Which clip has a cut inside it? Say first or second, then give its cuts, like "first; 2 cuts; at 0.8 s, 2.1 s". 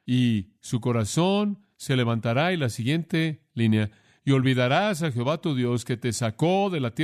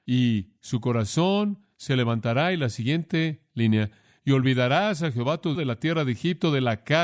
second; 1 cut; at 5.5 s